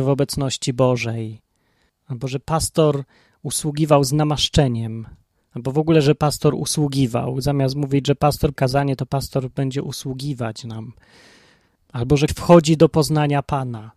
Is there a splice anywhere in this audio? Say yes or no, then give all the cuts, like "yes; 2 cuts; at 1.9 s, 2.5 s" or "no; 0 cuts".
yes; 2 cuts; at 8.6 s, 12.3 s